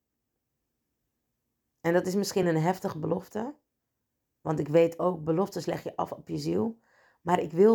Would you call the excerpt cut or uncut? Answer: uncut